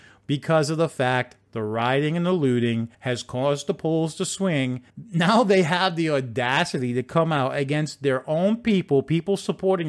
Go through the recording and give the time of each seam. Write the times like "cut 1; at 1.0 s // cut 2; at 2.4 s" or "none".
cut 1; at 2.9 s // cut 2; at 4.9 s

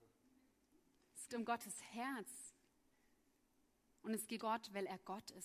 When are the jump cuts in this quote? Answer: cut 1; at 1.3 s // cut 2; at 4.4 s

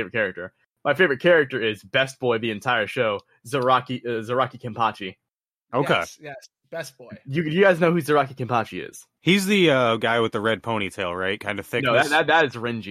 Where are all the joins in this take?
none

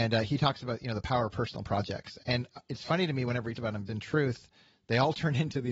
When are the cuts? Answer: cut 1; at 2.2 s // cut 2; at 3.5 s // cut 3; at 3.9 s

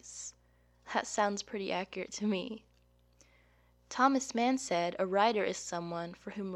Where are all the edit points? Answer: none

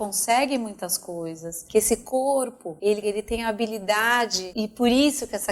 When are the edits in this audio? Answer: cut 1; at 3.0 s

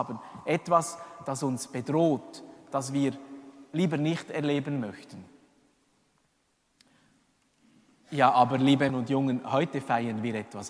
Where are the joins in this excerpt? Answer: cut 1; at 8.9 s

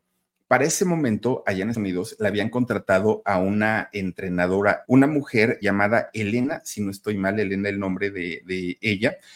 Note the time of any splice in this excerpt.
cut 1; at 1.7 s // cut 2; at 4.8 s // cut 3; at 5.6 s

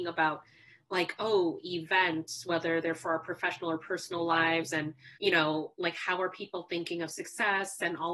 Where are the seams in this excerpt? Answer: cut 1; at 5.1 s

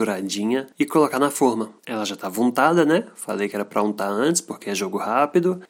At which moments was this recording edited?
cut 1; at 1.8 s

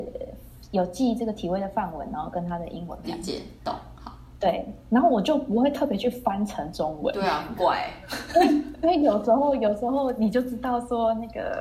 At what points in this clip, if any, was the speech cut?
cut 1; at 3.0 s

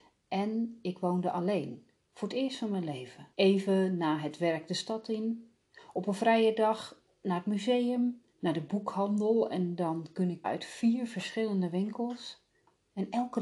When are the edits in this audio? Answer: cut 1; at 3.3 s // cut 2; at 8.3 s // cut 3; at 10.4 s

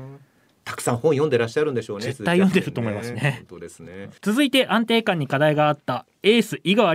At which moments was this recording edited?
cut 1; at 4.2 s

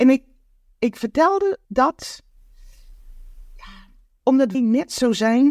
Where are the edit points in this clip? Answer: cut 1; at 1.6 s // cut 2; at 4.5 s

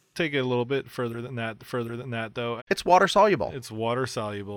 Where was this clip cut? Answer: cut 1; at 1.6 s // cut 2; at 2.6 s

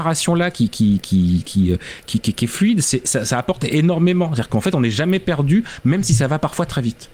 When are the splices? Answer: none

